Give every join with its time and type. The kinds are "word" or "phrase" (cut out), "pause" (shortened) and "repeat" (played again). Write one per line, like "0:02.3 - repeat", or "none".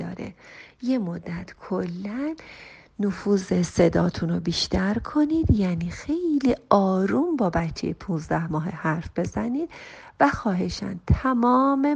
none